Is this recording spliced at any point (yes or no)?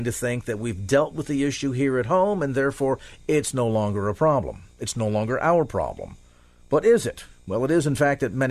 no